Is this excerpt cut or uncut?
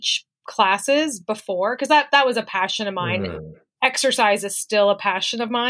uncut